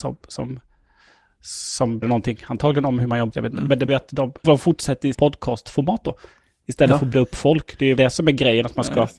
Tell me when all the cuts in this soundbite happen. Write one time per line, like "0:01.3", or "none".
0:02.0
0:03.3
0:03.9
0:04.4
0:05.1
0:07.1
0:08.0